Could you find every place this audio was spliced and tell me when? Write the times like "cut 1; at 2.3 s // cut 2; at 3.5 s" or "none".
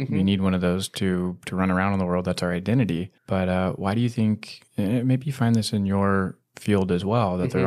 cut 1; at 3.2 s // cut 2; at 4.7 s